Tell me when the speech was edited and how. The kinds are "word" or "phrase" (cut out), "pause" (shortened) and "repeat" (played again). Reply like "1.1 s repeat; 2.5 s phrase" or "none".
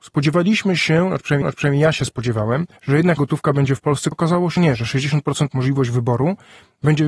1.4 s repeat; 2.8 s pause; 3.2 s word; 4.1 s word; 4.6 s word; 5.5 s phrase